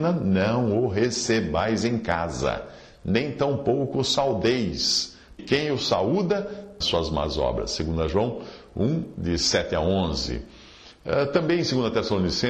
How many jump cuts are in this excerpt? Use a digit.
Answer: 2